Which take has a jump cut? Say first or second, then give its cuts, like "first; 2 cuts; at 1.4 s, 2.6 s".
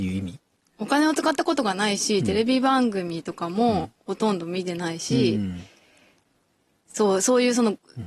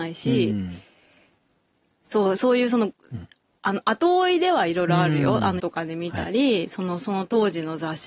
second; 1 cut; at 5.6 s